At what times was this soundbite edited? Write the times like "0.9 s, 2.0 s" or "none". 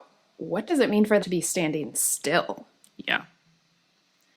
1.2 s